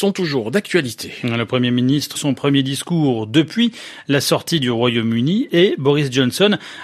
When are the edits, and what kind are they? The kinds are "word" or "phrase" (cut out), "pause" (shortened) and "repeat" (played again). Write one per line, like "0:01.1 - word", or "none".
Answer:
0:02.1 - phrase